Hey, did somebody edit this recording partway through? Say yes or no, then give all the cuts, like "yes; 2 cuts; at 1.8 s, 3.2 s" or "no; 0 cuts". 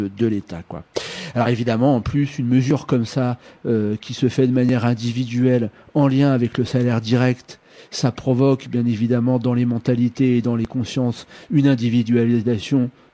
no; 0 cuts